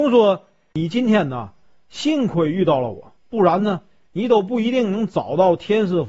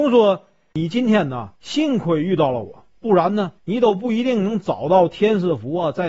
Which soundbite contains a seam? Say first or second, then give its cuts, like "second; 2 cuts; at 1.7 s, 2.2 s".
second; 2 cuts; at 1.5 s, 3.6 s